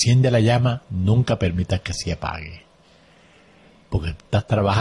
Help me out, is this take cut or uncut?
uncut